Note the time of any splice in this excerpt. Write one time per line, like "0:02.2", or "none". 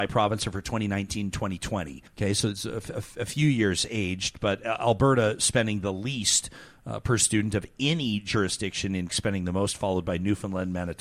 0:02.1
0:09.1